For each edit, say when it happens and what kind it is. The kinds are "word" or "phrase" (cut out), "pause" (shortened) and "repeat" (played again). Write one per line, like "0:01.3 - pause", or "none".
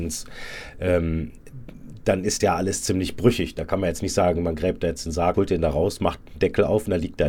0:02.4 - word
0:05.3 - word

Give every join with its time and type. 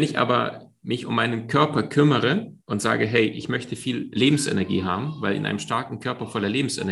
0:02.6 - pause

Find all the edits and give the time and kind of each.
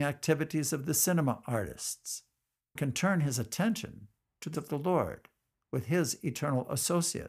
0:02.8 - word
0:04.5 - word

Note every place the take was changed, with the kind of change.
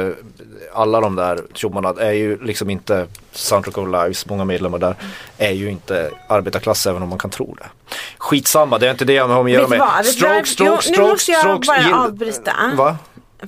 0:01.5 - pause
0:03.2 - pause

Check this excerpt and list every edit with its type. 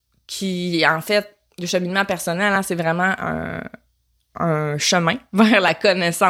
none

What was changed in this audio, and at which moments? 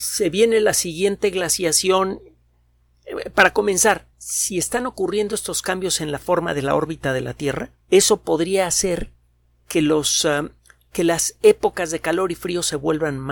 0:04.1 - pause
0:07.8 - pause
0:10.6 - pause

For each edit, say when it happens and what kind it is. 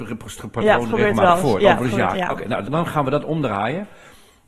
0:02.1 - word
0:02.6 - word

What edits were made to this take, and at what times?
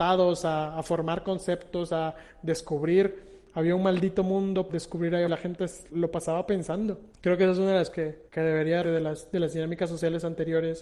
0:04.7 - word
0:05.3 - word
0:05.9 - word
0:07.1 - pause
0:07.9 - word
0:08.3 - pause
0:08.8 - word

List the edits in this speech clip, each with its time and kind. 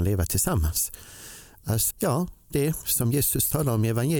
0:01.9 - word
0:02.5 - word

